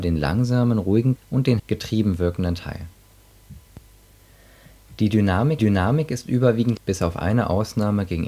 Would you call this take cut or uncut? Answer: cut